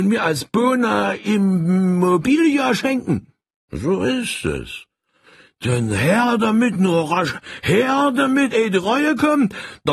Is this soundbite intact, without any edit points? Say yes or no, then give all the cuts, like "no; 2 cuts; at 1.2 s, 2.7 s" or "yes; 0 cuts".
yes; 0 cuts